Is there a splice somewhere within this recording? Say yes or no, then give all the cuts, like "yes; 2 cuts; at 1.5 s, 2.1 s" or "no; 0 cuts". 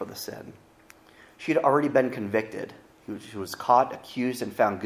no; 0 cuts